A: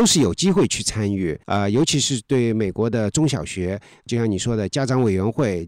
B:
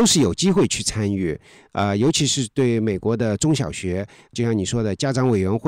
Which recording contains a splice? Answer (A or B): A